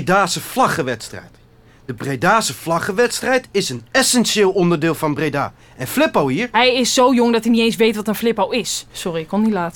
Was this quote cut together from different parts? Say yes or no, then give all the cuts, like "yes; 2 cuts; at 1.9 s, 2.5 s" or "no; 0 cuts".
no; 0 cuts